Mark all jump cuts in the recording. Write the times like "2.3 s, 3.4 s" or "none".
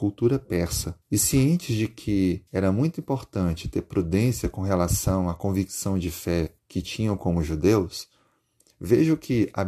1.0 s, 2.5 s, 6.6 s